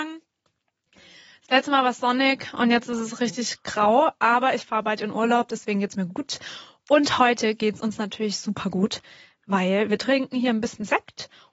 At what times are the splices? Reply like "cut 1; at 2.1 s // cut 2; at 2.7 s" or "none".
none

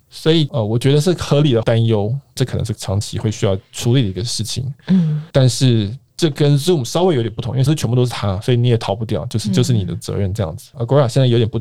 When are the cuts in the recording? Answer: cut 1; at 2.7 s // cut 2; at 5.3 s // cut 3; at 7.7 s

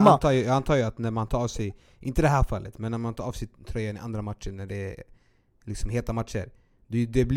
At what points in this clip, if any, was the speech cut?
none

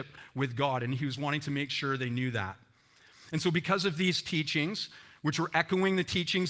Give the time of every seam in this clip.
none

